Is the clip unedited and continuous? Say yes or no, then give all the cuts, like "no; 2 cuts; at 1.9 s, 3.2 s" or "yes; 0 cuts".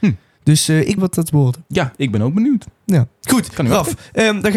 no; 2 cuts; at 1.0 s, 1.3 s